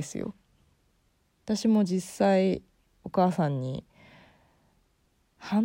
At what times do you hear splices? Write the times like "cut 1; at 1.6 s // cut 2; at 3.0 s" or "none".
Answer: none